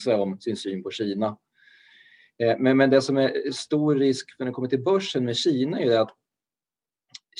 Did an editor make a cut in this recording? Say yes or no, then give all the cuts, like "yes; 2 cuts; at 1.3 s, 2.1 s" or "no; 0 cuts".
no; 0 cuts